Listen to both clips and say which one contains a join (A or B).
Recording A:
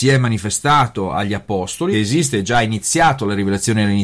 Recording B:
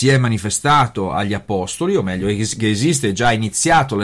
A